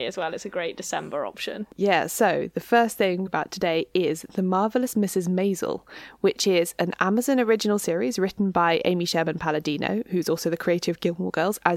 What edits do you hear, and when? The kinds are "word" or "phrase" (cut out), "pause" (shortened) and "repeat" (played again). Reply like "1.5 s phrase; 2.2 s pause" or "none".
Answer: 3.3 s phrase